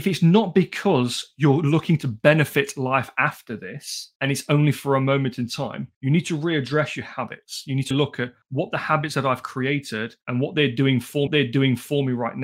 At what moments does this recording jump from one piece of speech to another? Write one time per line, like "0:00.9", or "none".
0:04.2
0:05.9
0:07.9
0:08.4
0:10.2
0:11.3